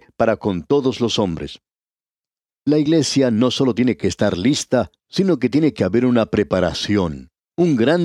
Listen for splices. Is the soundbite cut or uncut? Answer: uncut